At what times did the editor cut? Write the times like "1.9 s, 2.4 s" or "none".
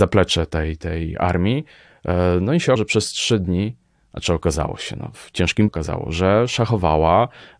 2.8 s, 5.1 s, 5.7 s